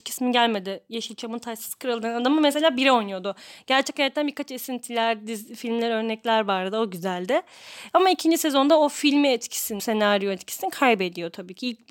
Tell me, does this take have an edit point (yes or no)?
yes